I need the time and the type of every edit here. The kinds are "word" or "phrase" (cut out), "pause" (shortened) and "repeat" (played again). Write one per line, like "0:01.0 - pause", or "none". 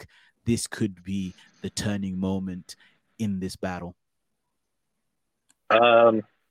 none

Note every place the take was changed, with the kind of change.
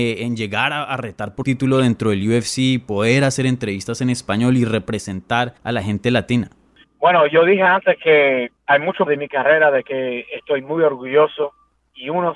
0:01.4 - word
0:05.6 - pause
0:06.8 - pause
0:08.6 - pause
0:09.1 - word

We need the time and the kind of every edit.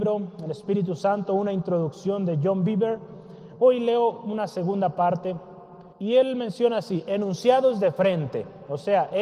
0:05.9 - pause

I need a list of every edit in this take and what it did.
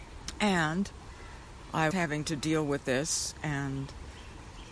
0:01.9 - word

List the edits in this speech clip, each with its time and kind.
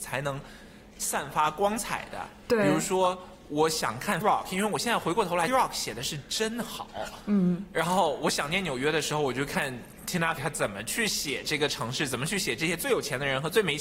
0:04.2 - word
0:05.5 - phrase
0:10.4 - word

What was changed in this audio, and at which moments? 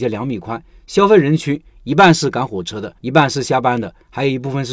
0:03.0 - pause

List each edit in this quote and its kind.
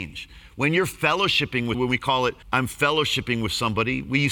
0:01.7 - word
0:02.4 - pause

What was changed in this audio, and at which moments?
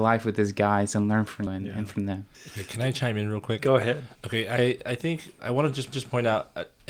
0:01.5 - word
0:02.3 - pause
0:05.4 - word
0:05.9 - repeat

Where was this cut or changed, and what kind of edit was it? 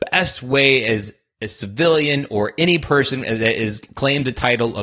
none

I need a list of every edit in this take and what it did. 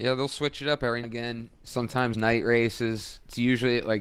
0:01.0 - word
0:02.1 - word

